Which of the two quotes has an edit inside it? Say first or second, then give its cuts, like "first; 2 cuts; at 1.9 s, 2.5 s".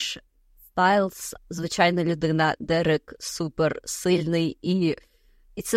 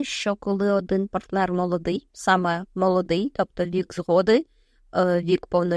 first; 1 cut; at 1.4 s